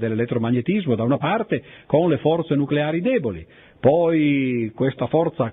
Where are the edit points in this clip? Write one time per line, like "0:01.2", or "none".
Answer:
none